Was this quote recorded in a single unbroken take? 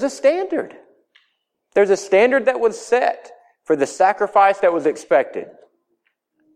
yes; 0 cuts

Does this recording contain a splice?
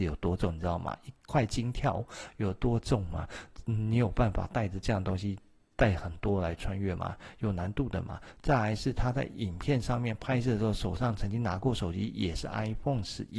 no; 0 cuts

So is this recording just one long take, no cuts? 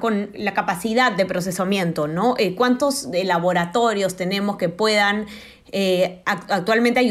yes; 0 cuts

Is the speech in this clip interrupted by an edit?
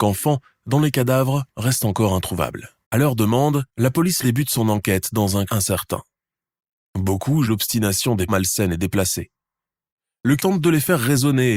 yes; 8 cuts; at 1.5 s, 2.8 s, 3.7 s, 4.2 s, 5.5 s, 7.4 s, 8.3 s, 10.4 s

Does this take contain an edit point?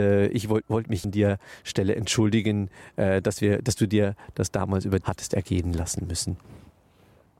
yes; 2 cuts; at 1.0 s, 5.0 s

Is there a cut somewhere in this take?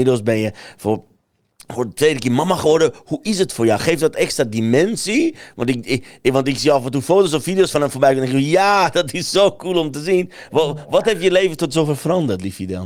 no; 0 cuts

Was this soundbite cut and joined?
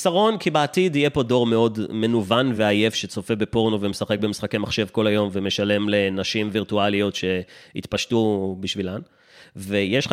no; 0 cuts

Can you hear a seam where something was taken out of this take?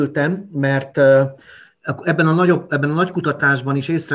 no; 0 cuts

